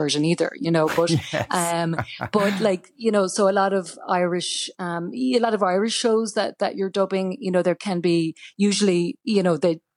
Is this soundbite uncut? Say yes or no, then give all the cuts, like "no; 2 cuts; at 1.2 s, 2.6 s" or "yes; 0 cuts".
yes; 0 cuts